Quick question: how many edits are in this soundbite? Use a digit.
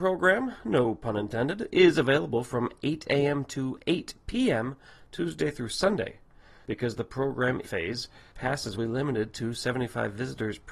2